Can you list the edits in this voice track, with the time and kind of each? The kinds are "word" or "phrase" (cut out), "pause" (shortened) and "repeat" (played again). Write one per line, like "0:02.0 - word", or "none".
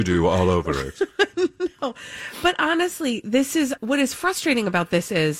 0:03.8 - word